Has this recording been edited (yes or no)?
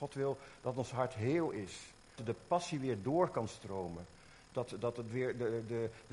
yes